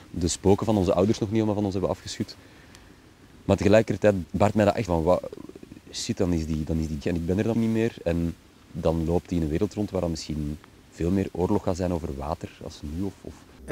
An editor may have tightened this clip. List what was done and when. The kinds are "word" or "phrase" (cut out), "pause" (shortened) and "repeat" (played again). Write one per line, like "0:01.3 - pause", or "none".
0:04.2 - word
0:04.9 - word
0:07.0 - word
0:07.5 - word